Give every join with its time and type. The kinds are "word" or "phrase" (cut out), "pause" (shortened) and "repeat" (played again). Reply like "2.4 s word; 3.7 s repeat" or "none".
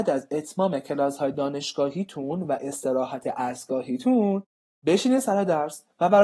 none